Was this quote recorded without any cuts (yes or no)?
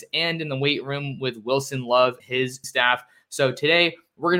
no